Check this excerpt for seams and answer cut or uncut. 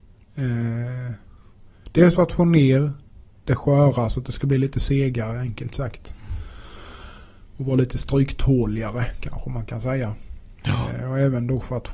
uncut